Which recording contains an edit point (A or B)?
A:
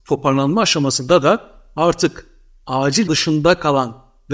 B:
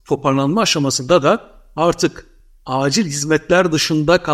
A